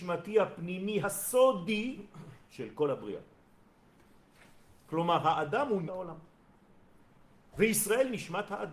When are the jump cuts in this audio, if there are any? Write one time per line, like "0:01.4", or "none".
0:01.0
0:02.5
0:04.8
0:05.9